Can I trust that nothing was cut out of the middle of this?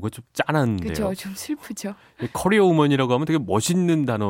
yes; 0 cuts

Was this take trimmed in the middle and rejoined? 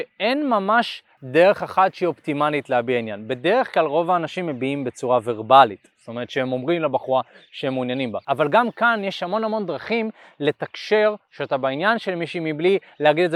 no; 0 cuts

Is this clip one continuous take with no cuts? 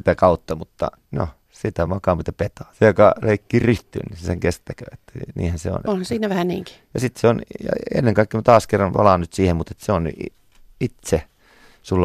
yes; 0 cuts

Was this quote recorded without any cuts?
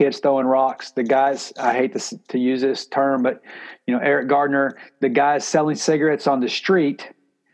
yes; 0 cuts

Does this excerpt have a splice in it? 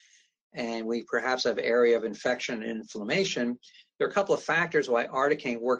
no; 0 cuts

